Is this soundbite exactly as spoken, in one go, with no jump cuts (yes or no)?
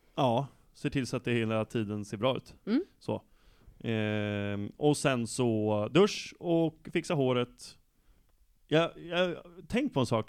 yes